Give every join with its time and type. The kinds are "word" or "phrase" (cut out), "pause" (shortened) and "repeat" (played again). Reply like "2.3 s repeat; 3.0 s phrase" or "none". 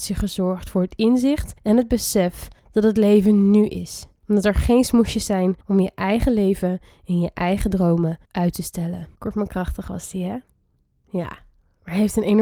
1.6 s pause; 2.6 s pause; 4.2 s pause; 5.6 s pause; 8.2 s pause; 9.1 s pause